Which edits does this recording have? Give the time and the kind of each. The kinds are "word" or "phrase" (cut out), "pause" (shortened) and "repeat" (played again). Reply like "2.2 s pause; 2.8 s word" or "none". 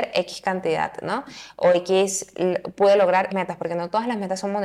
3.3 s word